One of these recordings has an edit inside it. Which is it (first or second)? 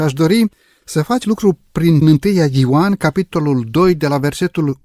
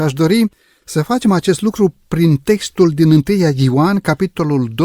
first